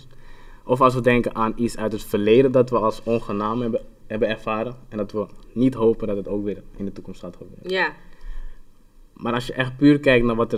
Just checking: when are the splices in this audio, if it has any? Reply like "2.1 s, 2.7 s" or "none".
none